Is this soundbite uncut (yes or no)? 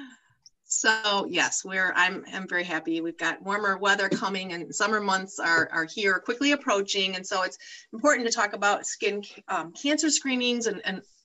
yes